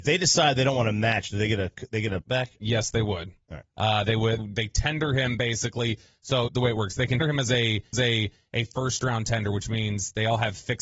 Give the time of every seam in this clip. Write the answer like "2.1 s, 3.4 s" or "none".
2.2 s, 4.4 s, 6.5 s, 7.2 s, 7.9 s